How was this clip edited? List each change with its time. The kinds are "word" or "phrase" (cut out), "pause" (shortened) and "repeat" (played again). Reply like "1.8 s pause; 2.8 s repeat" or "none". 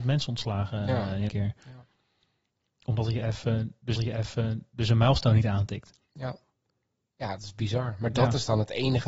1.3 s word; 4.0 s repeat; 6.1 s pause; 7.4 s word